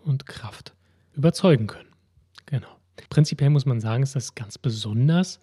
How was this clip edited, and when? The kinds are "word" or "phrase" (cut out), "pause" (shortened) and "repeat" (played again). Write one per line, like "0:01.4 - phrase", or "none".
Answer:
0:01.1 - word
0:03.1 - pause